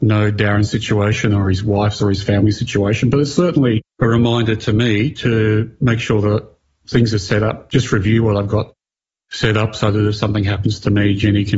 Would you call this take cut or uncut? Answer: uncut